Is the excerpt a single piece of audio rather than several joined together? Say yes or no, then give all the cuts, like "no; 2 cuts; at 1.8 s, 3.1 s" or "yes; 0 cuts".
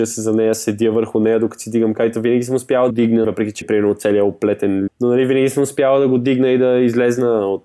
no; 4 cuts; at 2.9 s, 3.2 s, 3.6 s, 4.9 s